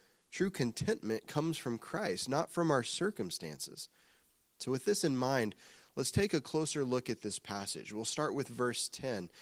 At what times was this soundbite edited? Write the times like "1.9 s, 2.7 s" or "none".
none